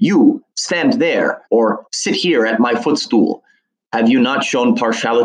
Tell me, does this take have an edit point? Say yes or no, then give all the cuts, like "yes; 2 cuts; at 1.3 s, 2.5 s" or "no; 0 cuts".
yes; 1 cut; at 1.5 s